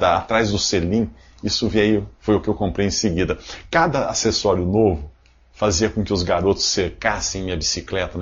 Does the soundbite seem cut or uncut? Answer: uncut